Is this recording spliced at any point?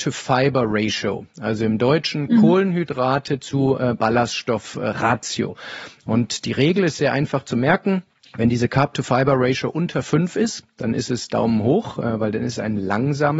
yes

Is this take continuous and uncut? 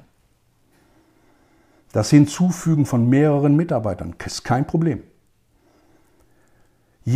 yes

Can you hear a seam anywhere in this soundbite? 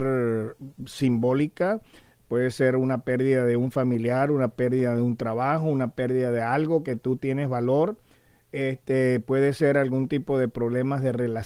no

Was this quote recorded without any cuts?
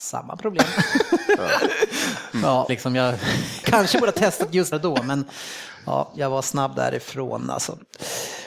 no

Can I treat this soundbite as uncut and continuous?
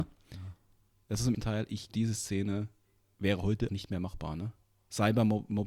no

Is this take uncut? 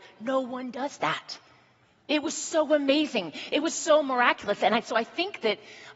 yes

